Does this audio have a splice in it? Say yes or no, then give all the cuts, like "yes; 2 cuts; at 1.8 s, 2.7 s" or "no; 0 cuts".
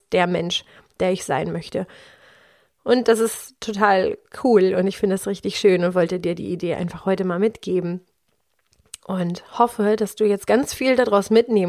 no; 0 cuts